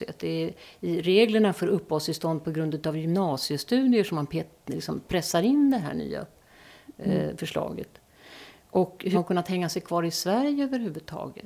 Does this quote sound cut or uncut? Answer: cut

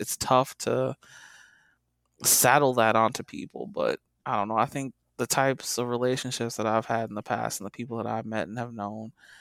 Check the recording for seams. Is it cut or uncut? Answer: uncut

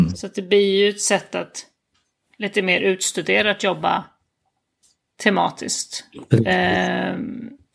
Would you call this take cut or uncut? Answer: uncut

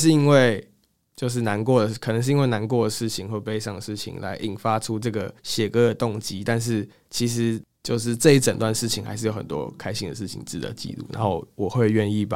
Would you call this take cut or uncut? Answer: cut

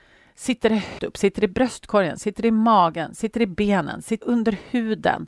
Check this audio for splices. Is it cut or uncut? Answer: cut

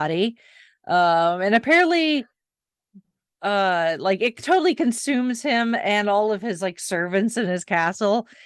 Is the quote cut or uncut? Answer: uncut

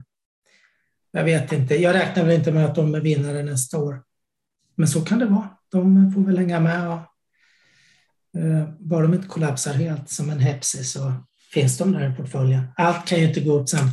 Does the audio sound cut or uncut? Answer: uncut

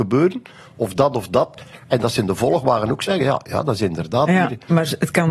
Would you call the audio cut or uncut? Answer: uncut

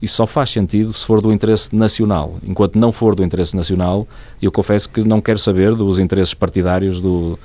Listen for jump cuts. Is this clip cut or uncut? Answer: uncut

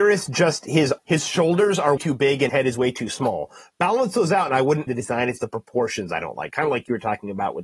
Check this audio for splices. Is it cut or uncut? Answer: cut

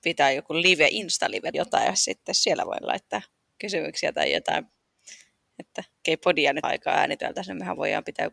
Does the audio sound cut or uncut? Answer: cut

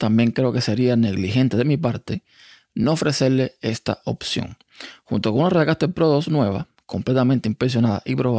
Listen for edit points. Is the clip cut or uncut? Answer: uncut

